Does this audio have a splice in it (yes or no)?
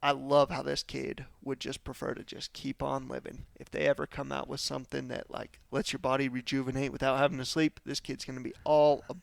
yes